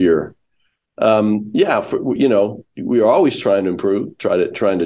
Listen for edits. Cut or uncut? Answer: uncut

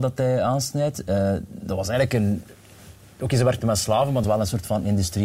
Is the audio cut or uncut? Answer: cut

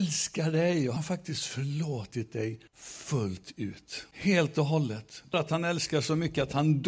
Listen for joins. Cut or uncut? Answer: cut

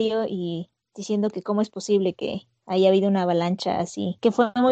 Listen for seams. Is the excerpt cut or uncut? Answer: cut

